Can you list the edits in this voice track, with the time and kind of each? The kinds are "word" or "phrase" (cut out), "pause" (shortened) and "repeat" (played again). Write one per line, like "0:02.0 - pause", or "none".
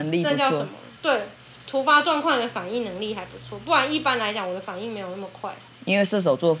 0:01.0 - pause